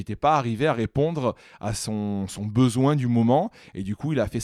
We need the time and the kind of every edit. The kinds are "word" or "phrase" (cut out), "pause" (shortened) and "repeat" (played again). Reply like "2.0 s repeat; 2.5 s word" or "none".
none